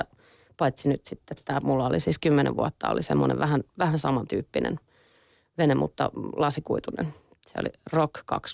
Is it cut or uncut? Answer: uncut